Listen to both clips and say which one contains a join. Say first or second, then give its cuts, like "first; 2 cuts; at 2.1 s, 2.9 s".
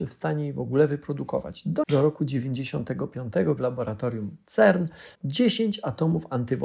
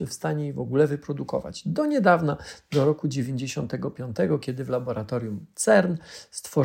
first; 3 cuts; at 1.8 s, 3.6 s, 5.2 s